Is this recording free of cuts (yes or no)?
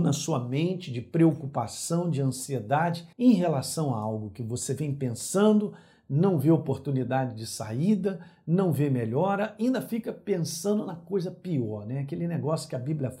no